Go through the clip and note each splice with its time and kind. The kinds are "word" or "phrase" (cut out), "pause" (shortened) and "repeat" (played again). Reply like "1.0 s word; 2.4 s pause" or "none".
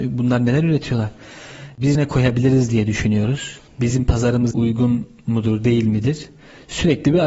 1.9 s word; 4.5 s word

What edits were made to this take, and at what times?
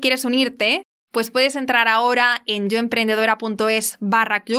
none

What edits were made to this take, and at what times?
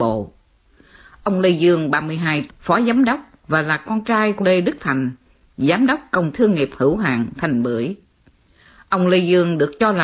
2.5 s word; 4.4 s word; 6.3 s word

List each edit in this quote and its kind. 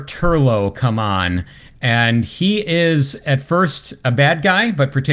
none

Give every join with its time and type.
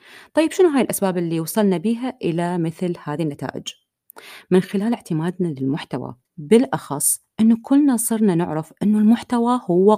6.3 s pause

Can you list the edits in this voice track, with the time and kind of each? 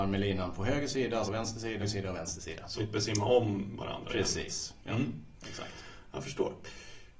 1.3 s word; 1.8 s phrase; 2.8 s word

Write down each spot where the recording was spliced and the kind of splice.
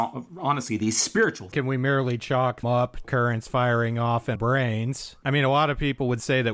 1.5 s phrase; 2.6 s word; 3.0 s phrase; 4.4 s word

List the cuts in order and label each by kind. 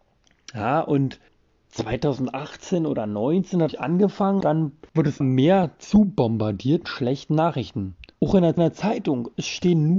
1.3 s pause; 3.7 s phrase; 4.4 s word; 4.9 s pause; 5.2 s word; 6.8 s word; 8.1 s pause; 8.6 s repeat

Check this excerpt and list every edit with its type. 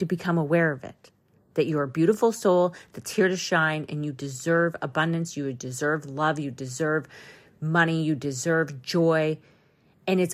none

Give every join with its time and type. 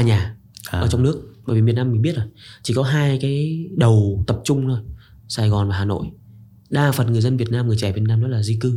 none

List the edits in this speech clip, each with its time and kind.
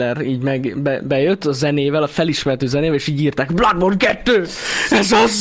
none

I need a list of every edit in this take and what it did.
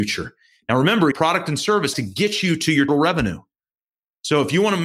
1.1 s word; 1.9 s word; 2.9 s word

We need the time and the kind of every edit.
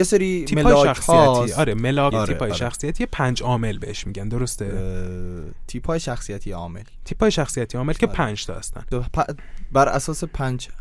2.1 s word; 8.9 s phrase

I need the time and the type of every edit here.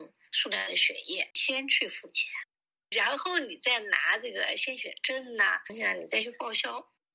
1.3 s pause

